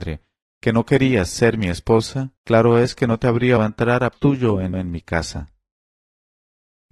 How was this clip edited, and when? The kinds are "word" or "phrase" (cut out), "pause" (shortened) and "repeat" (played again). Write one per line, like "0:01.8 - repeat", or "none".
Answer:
0:02.4 - pause
0:03.6 - word
0:04.1 - word
0:04.7 - repeat